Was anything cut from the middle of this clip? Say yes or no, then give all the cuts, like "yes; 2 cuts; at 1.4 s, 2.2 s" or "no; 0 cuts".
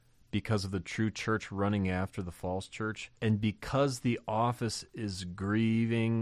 yes; 1 cut; at 3.1 s